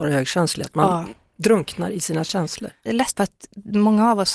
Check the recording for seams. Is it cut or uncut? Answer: cut